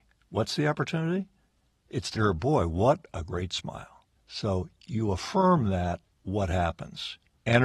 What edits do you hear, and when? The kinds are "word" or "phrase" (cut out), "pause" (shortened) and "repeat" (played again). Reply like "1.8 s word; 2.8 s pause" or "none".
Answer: 2.2 s word